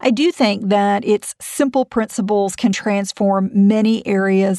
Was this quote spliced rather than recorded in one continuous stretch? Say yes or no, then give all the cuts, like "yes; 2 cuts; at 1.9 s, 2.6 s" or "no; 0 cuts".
no; 0 cuts